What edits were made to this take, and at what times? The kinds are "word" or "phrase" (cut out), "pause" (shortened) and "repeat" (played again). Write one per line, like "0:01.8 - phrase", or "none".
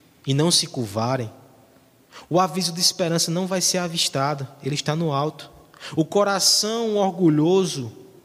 none